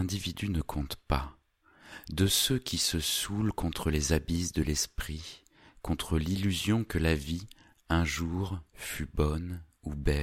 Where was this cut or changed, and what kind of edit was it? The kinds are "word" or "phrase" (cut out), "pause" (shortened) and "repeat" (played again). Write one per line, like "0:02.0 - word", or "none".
none